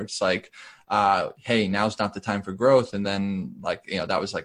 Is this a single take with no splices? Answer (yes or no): yes